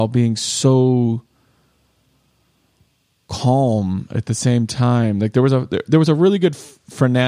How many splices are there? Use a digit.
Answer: 0